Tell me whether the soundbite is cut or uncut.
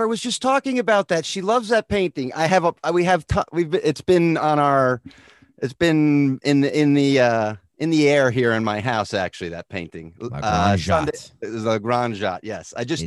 uncut